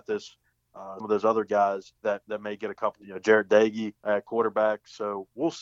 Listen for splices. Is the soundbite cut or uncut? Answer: cut